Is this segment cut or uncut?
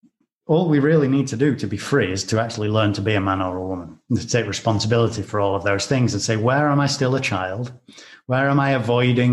uncut